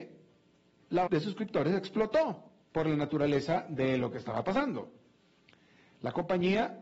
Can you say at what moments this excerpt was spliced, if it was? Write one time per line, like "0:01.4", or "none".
0:01.1